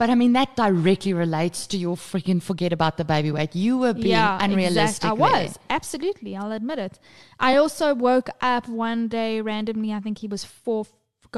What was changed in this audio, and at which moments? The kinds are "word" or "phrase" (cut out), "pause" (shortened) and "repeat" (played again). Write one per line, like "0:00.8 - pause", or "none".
none